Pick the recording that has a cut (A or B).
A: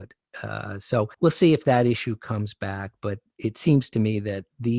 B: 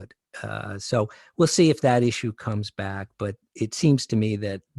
A